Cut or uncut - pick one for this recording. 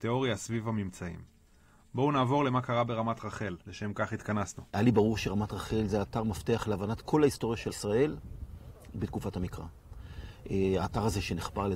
cut